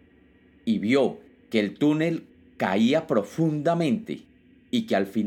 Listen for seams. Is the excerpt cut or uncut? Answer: uncut